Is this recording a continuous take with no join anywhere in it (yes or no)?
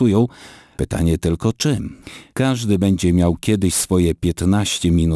yes